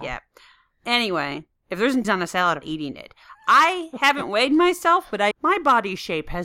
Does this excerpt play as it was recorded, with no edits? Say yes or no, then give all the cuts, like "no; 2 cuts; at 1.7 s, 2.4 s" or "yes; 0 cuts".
no; 4 cuts; at 1.6 s, 2.0 s, 2.6 s, 5.3 s